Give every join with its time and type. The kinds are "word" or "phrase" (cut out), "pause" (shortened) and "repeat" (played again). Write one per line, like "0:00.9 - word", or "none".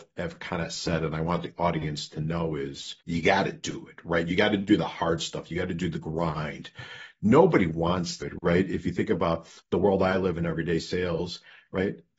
0:03.0 - pause
0:08.2 - word